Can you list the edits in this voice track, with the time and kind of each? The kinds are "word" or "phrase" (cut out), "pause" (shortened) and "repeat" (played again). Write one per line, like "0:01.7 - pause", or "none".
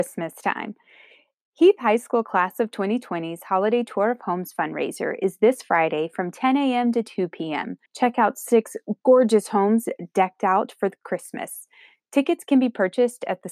0:07.9 - pause

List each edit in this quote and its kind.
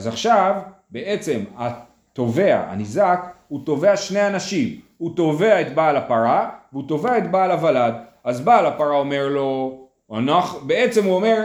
none

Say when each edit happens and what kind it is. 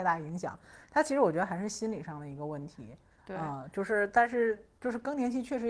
none

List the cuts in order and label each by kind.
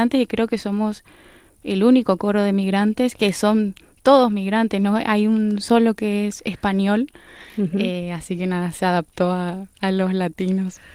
none

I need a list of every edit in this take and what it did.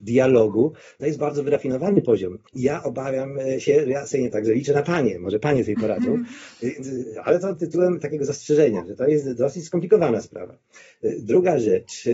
0:02.5 - pause
0:04.3 - word

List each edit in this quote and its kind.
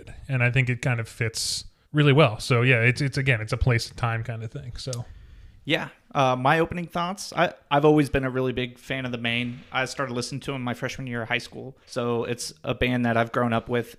0:01.8 - pause
0:11.8 - pause

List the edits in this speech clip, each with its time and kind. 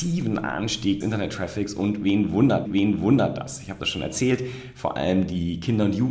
0:01.0 - word
0:02.7 - repeat

